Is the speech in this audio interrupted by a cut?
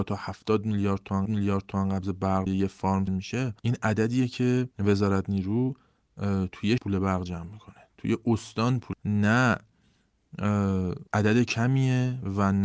yes; 8 cuts; at 1.3 s, 2.5 s, 3.1 s, 3.6 s, 4.7 s, 6.8 s, 8.9 s, 11.1 s

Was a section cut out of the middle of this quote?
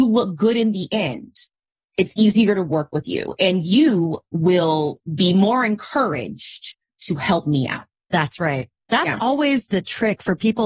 no; 0 cuts

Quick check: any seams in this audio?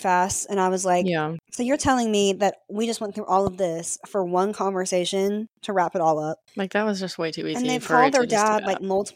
yes; 1 cut; at 6.5 s

